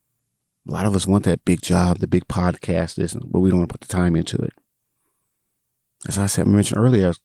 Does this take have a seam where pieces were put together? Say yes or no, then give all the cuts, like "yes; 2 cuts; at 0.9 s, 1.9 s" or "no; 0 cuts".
no; 0 cuts